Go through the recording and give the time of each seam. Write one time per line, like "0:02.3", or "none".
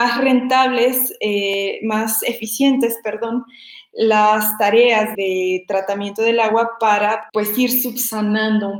0:05.1
0:07.3